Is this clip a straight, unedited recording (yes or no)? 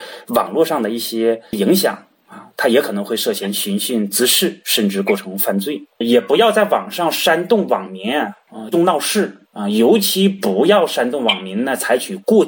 no